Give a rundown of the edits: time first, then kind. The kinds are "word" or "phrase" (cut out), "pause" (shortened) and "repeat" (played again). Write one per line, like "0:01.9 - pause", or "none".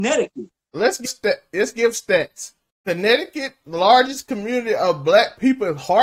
0:01.1 - word
0:02.7 - pause